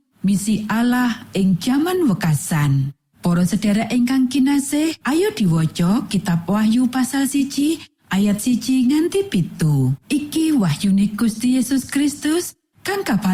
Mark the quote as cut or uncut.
cut